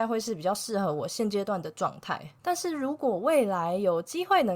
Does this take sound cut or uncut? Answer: cut